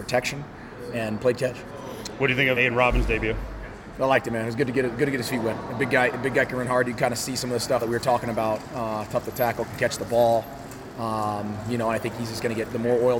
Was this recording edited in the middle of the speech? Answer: yes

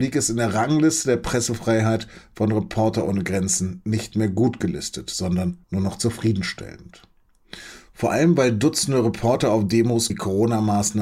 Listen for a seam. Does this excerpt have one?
yes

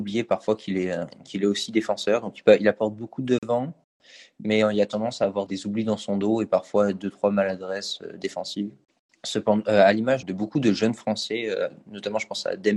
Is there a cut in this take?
yes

